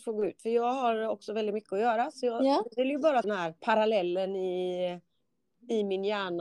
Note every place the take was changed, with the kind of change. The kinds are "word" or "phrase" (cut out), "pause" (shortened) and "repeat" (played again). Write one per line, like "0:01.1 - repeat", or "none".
0:03.2 - word
0:03.6 - pause